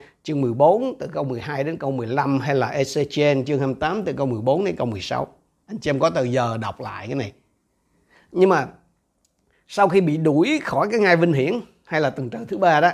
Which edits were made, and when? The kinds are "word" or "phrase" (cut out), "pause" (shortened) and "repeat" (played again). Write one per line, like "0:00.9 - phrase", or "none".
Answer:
none